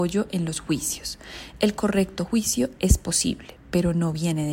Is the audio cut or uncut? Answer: uncut